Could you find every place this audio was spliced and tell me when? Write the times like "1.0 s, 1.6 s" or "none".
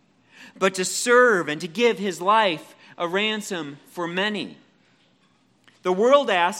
none